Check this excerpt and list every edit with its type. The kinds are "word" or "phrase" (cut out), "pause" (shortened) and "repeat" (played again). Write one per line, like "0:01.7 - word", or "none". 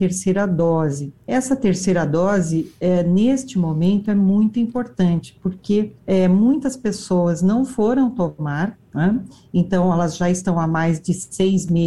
0:01.2 - pause
0:06.0 - pause
0:08.8 - pause